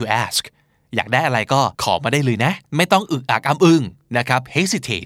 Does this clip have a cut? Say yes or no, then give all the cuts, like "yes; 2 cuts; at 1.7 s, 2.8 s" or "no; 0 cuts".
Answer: yes; 2 cuts; at 1.7 s, 2.7 s